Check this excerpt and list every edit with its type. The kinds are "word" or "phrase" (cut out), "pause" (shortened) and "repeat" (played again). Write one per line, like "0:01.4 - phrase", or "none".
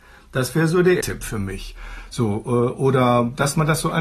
0:01.0 - word